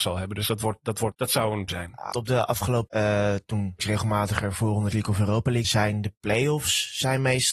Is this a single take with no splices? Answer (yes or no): no